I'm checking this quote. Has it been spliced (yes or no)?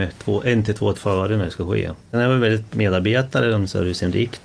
yes